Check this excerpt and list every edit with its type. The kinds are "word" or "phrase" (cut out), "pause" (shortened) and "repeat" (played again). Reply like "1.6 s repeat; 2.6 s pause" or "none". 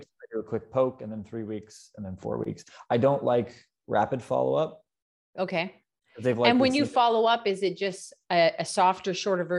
none